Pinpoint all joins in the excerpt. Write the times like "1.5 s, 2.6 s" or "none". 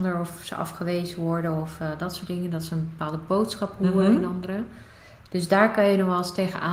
none

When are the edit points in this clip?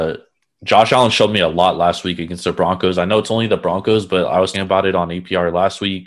4.5 s

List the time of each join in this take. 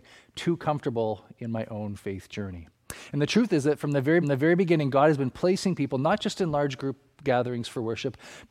4.2 s

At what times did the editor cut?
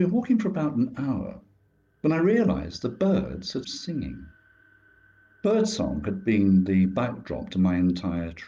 3.6 s

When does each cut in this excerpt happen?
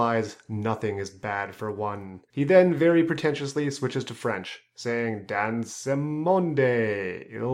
2.3 s

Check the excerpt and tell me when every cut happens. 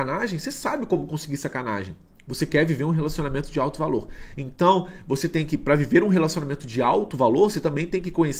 none

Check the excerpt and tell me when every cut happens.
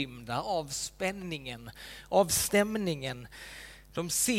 none

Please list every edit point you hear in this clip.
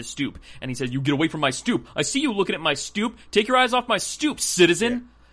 none

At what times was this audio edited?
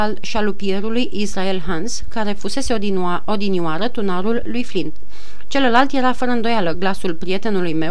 none

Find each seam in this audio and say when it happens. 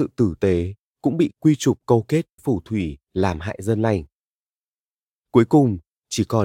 2.4 s

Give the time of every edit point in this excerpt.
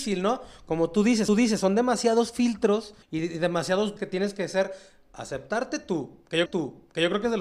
1.3 s, 3.0 s, 4.0 s, 6.5 s

